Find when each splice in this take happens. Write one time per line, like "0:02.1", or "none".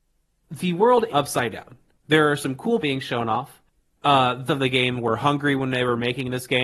0:01.1
0:02.8
0:04.5

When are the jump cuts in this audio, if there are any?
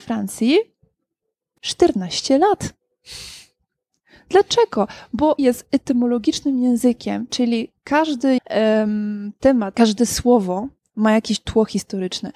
0:01.6
0:05.4
0:08.4
0:09.7

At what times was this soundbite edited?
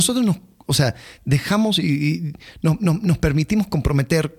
none

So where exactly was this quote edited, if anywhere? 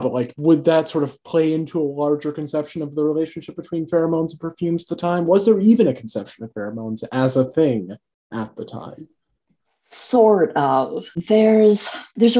none

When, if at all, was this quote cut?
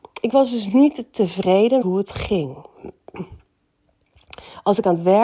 0:01.8

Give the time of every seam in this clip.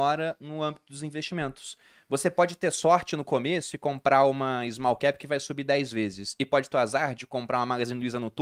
0:06.7

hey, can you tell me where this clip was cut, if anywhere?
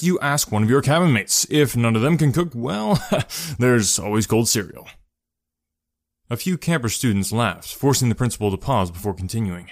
none

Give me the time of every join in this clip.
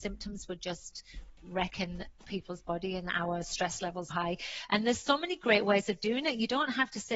0:04.1

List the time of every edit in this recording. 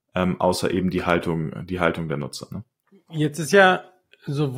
none

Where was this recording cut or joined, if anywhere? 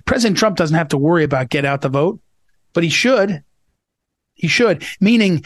none

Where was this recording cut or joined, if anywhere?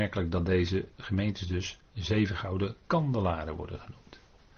0:02.8

